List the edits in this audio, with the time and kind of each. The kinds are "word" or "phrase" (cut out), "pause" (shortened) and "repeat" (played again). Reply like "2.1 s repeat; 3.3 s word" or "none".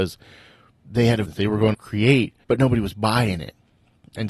1.2 s word; 1.7 s word; 2.4 s pause